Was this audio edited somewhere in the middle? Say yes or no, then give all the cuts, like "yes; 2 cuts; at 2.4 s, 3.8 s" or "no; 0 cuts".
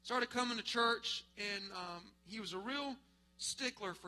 no; 0 cuts